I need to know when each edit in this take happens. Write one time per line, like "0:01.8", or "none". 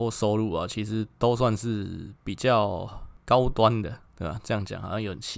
0:04.1